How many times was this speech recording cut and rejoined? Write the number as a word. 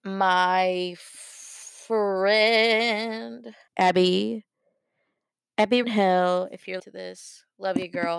three